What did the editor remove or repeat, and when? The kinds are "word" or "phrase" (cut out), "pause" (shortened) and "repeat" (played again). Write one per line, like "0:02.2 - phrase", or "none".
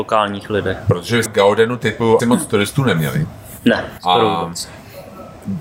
0:01.3 - word
0:02.2 - word
0:04.0 - word